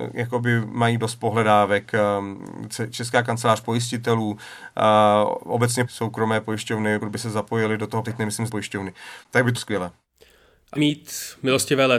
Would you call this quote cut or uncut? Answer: cut